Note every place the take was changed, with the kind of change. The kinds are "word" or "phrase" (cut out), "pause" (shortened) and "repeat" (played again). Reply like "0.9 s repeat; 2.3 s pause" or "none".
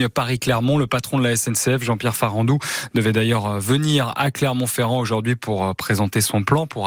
none